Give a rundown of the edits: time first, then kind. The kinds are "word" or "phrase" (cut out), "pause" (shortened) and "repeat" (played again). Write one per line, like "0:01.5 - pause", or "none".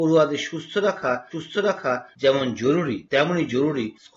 0:01.3 - repeat